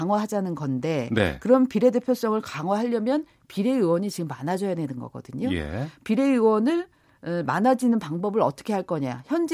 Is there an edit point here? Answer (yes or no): no